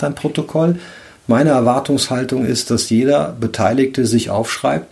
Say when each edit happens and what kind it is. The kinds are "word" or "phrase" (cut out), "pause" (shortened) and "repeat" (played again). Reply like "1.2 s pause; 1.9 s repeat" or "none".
none